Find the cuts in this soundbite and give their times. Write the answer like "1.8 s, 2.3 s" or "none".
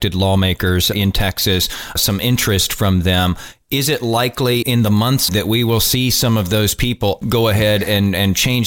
0.9 s, 2.0 s, 4.6 s, 5.3 s, 7.2 s